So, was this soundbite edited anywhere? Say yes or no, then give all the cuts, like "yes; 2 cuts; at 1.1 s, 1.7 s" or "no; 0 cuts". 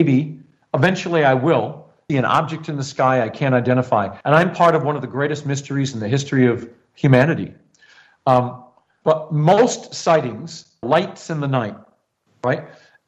yes; 3 cuts; at 2.1 s, 4.2 s, 10.8 s